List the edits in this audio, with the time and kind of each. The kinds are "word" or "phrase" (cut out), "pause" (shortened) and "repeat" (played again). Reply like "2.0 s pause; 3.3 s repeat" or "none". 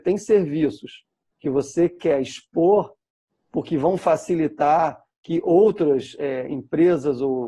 none

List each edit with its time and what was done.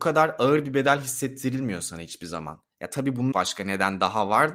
3.3 s phrase

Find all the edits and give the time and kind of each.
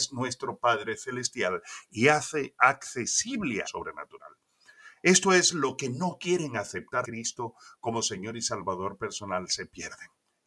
3.6 s phrase; 7.0 s word

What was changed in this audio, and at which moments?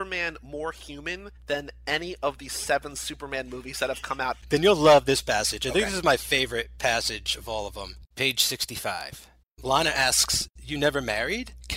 8.1 s pause; 9.4 s pause; 10.5 s pause

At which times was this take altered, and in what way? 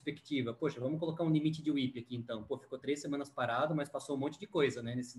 none

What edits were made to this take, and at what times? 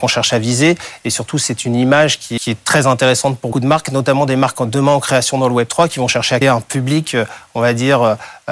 2.4 s word; 3.5 s word; 6.4 s word

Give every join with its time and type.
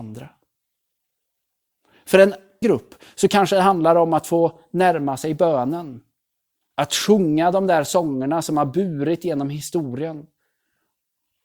2.6 s word

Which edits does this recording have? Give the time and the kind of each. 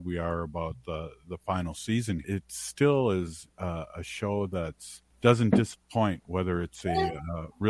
2.2 s phrase; 5.1 s pause

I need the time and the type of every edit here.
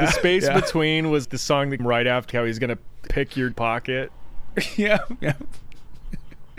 1.2 s word; 1.8 s word; 2.3 s word; 3.1 s word; 3.5 s word

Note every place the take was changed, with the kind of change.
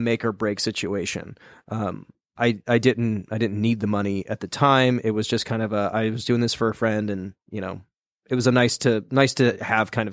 none

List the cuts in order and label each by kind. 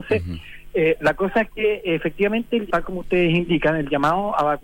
2.7 s word

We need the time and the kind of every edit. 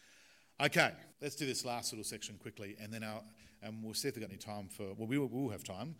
1.1 s pause

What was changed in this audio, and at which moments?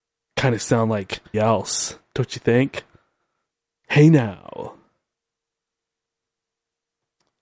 1.3 s word

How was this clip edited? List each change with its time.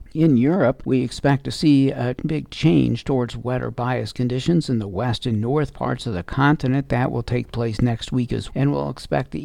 8.5 s word

